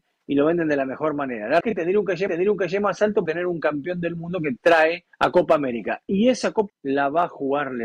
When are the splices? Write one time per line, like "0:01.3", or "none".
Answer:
0:01.6
0:02.3
0:03.3
0:05.1
0:06.7